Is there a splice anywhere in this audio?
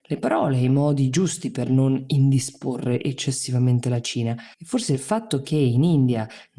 yes; 1 cut; at 4.5 s

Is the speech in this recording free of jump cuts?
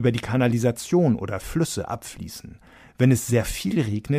yes; 0 cuts

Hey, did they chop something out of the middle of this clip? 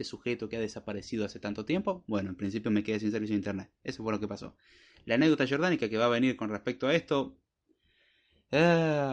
no; 0 cuts

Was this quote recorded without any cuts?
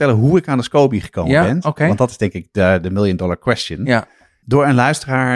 yes; 0 cuts

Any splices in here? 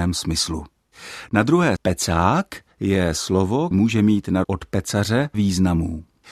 yes; 4 cuts; at 1.8 s, 3.7 s, 4.4 s, 5.3 s

